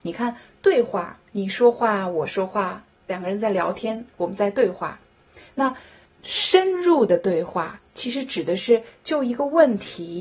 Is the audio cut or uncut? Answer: cut